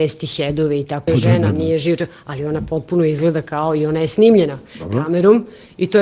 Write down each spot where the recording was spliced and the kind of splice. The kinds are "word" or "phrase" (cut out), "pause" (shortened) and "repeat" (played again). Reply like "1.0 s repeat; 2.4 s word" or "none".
1.1 s phrase